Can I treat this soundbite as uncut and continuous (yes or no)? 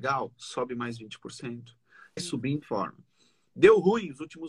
no